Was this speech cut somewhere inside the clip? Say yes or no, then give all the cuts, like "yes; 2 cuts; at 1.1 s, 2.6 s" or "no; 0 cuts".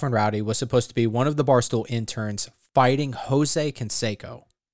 no; 0 cuts